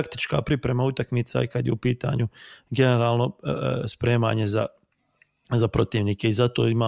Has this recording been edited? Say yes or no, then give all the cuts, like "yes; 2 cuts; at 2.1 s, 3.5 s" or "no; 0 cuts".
no; 0 cuts